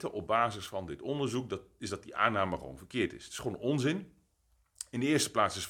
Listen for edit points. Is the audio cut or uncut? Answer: uncut